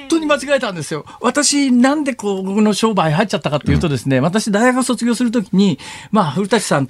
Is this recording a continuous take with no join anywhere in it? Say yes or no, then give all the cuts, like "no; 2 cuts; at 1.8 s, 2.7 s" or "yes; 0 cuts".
yes; 0 cuts